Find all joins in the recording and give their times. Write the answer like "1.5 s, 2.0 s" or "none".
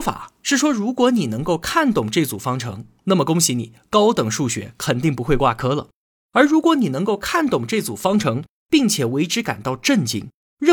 none

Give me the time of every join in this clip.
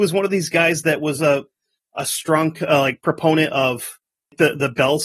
none

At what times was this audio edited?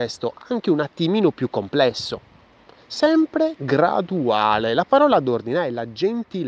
none

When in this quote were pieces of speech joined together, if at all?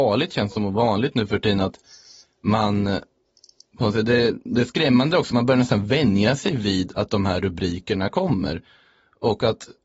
none

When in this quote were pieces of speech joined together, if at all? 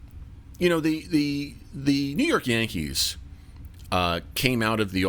none

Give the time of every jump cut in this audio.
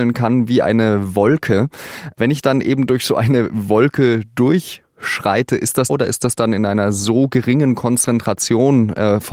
5.9 s

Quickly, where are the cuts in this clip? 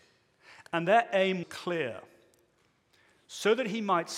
1.4 s

